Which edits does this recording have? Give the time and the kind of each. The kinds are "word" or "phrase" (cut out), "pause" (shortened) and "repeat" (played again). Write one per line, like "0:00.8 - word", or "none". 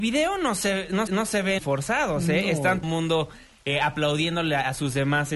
0:01.1 - repeat
0:01.6 - word
0:02.8 - phrase